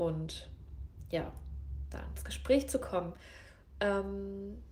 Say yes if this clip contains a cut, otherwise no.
no